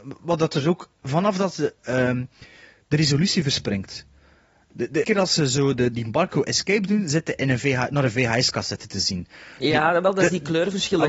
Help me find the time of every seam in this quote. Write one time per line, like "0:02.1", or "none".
0:00.9
0:05.0